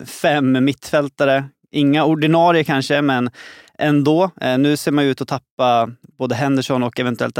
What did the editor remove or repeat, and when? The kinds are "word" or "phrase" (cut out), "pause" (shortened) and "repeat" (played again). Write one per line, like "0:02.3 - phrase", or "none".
none